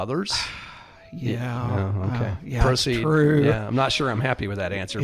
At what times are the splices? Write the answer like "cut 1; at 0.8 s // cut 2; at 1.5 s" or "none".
none